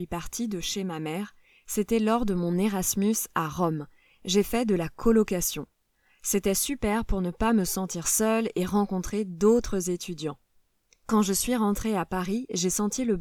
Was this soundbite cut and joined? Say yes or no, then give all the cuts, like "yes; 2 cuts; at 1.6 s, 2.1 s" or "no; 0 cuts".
no; 0 cuts